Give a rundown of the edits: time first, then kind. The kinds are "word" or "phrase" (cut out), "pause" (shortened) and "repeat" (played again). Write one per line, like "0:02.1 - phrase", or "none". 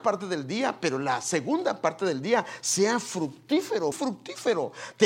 0:03.9 - word